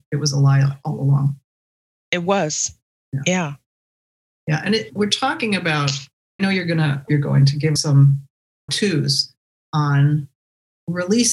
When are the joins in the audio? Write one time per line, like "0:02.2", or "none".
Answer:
0:04.9
0:06.4
0:07.1
0:07.8
0:08.7